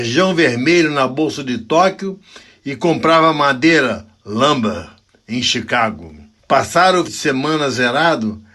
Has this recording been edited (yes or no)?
yes